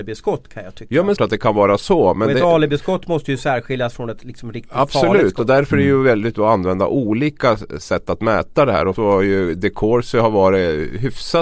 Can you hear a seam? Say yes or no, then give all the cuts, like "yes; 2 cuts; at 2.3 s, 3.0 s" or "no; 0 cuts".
yes; 3 cuts; at 1.2 s, 6.3 s, 8.9 s